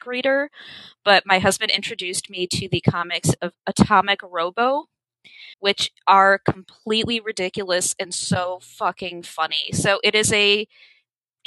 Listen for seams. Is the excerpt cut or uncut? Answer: cut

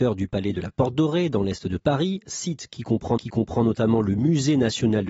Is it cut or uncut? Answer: cut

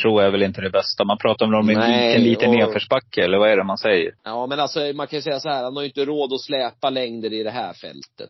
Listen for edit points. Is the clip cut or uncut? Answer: cut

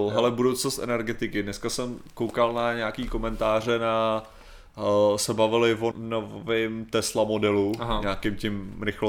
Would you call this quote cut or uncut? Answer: cut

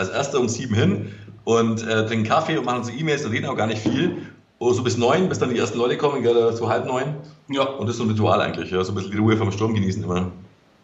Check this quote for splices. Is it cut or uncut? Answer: uncut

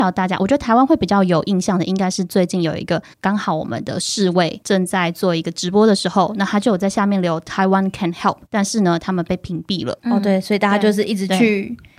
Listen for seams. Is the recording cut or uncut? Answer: cut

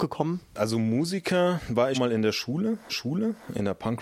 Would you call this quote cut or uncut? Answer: cut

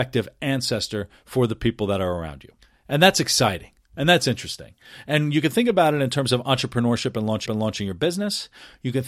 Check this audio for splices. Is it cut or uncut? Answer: cut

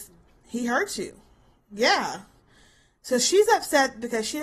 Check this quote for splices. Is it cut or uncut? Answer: uncut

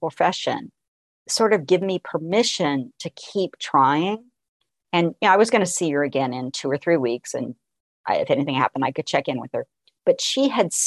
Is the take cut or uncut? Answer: uncut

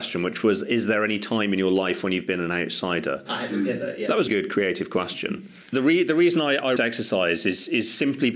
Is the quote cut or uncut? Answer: cut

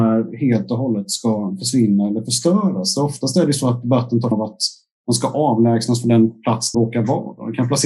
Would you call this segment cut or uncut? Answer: cut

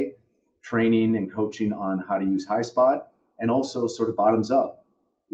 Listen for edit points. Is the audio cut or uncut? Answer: uncut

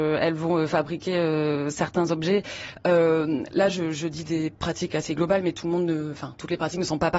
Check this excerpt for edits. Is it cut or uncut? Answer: uncut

